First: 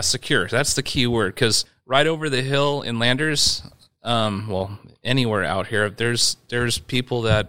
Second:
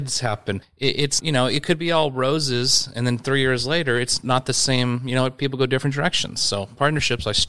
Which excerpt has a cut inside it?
second; 1 cut; at 1.2 s

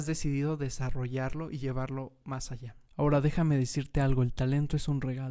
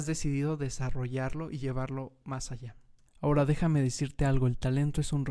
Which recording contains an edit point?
first; 1 cut; at 2.9 s

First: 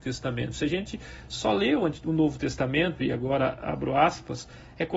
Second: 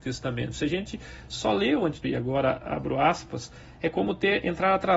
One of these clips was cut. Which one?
second; 1 cut; at 2.0 s

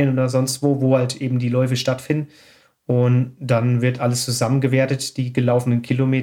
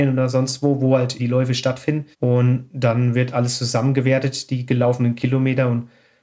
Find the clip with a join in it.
second; 2 cuts; at 1.2 s, 2.1 s

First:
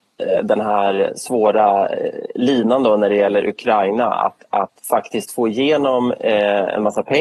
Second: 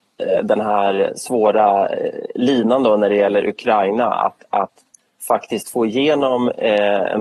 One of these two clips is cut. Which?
first; 1 cut; at 4.8 s

